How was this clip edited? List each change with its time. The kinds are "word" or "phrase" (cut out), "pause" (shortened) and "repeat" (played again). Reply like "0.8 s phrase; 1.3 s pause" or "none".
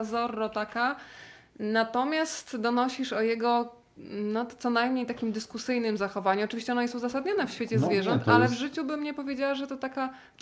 none